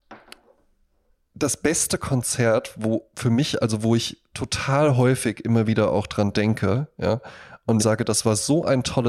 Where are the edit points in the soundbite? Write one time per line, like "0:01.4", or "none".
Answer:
0:03.6
0:07.8

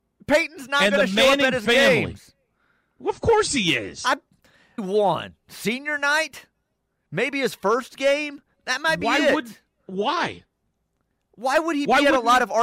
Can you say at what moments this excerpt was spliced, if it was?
0:04.8

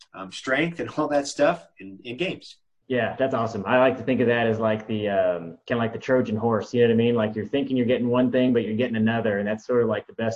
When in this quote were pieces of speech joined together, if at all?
none

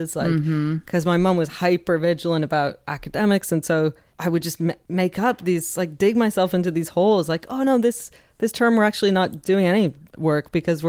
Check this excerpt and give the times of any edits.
none

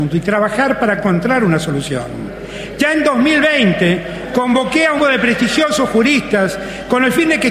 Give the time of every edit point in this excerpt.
0:05.0

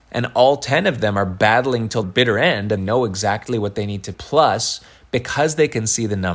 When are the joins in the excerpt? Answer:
0:02.0
0:02.8
0:04.1

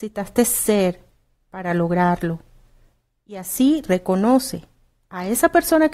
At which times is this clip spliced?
none

